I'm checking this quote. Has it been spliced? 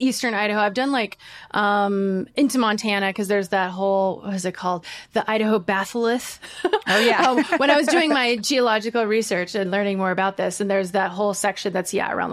no; 0 cuts

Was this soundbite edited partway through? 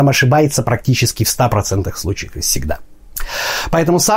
no; 0 cuts

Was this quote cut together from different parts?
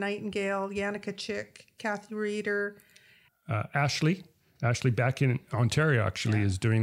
no; 0 cuts

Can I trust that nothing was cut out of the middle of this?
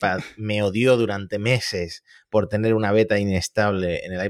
yes; 0 cuts

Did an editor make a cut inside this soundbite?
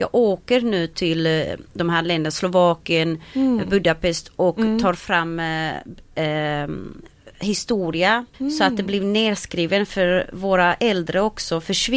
yes; 1 cut; at 8.3 s

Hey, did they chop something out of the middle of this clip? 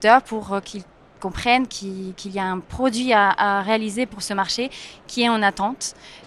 no; 0 cuts

